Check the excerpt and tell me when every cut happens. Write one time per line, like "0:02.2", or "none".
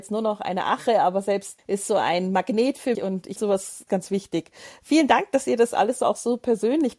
0:01.6
0:02.9
0:03.4
0:03.9